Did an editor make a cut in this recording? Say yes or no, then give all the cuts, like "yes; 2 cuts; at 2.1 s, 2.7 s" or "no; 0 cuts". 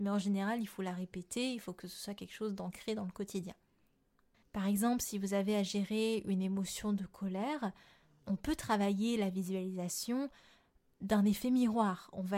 no; 0 cuts